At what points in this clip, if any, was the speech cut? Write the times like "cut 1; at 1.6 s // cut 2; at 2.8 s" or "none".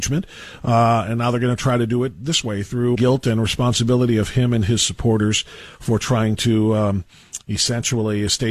cut 1; at 2.9 s